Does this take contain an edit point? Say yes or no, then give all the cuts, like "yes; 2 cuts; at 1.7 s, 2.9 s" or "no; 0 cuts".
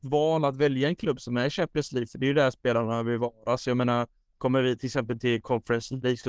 no; 0 cuts